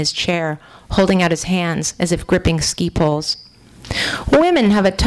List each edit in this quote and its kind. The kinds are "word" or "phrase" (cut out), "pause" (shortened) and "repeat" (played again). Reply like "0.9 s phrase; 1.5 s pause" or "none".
none

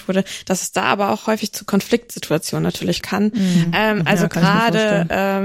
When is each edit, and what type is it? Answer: 3.0 s word

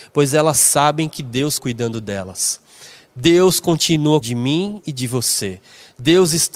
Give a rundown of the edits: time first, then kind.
1.6 s word; 4.2 s word

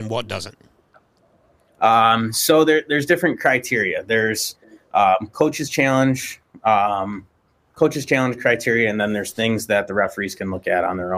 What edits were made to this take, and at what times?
none

